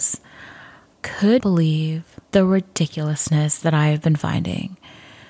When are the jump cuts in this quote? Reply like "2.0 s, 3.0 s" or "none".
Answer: 0.9 s, 1.4 s, 2.2 s